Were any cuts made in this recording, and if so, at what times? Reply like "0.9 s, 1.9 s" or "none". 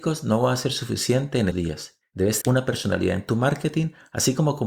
1.5 s, 2.4 s